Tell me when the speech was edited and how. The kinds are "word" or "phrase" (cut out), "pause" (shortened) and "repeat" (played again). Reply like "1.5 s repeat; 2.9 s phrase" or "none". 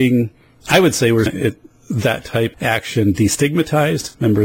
1.3 s word; 2.5 s word